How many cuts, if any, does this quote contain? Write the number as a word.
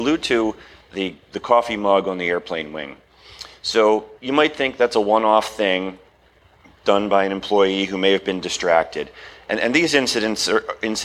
one